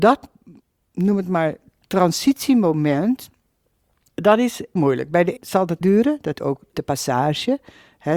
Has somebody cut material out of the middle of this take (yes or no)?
yes